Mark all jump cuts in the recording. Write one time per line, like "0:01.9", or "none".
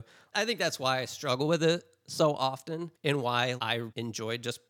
0:03.0